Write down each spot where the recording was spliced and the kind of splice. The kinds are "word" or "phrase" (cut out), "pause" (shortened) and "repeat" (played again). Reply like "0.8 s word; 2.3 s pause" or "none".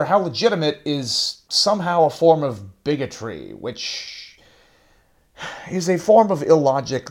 1.4 s pause